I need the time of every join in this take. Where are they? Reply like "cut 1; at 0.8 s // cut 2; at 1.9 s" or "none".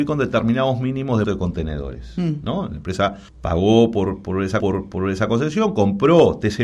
cut 1; at 1.2 s // cut 2; at 3.3 s // cut 3; at 4.6 s

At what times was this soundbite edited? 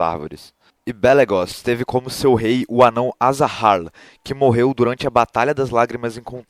none

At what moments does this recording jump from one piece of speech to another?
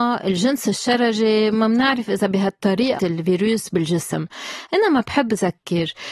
cut 1; at 3.0 s

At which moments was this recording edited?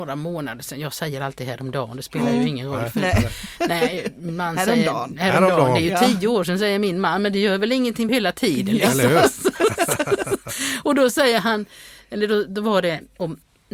cut 1; at 8.1 s

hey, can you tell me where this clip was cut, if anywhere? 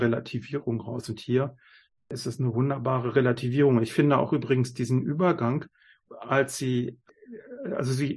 none

